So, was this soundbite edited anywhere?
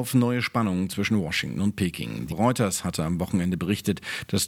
yes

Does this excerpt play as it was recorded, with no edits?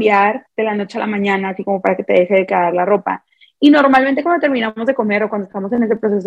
yes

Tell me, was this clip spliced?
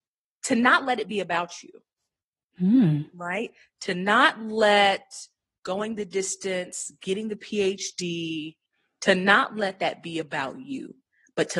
no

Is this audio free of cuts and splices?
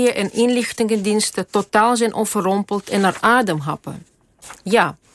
yes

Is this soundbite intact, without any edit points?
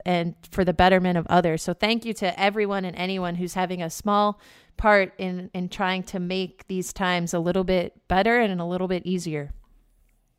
yes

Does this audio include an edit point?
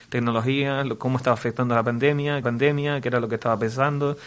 yes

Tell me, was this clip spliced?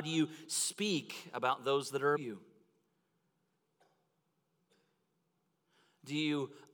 yes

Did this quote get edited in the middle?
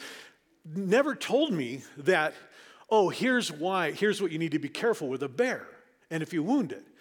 no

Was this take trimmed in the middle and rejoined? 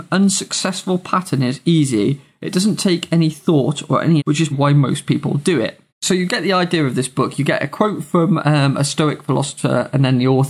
yes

